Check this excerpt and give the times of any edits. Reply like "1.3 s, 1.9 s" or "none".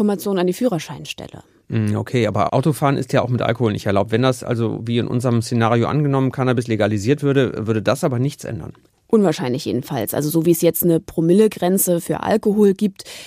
none